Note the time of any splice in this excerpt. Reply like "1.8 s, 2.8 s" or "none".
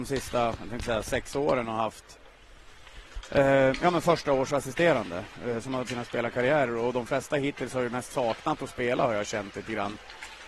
5.9 s